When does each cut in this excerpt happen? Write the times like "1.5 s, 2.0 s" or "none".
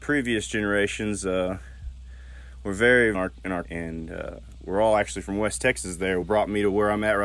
3.1 s, 3.6 s, 6.2 s